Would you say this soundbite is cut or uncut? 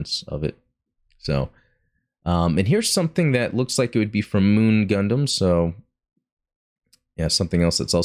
uncut